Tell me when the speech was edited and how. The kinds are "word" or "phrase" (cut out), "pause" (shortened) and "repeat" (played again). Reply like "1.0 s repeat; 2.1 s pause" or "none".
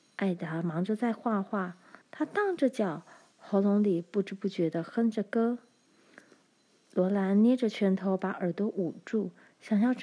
2.0 s pause